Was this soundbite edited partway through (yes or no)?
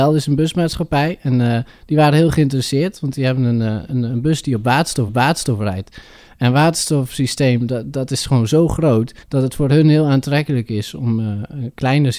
yes